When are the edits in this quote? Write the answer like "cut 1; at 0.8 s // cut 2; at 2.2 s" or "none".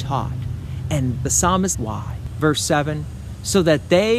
cut 1; at 1.2 s // cut 2; at 1.7 s